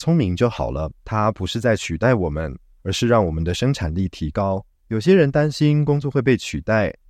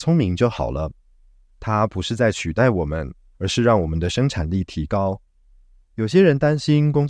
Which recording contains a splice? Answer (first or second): first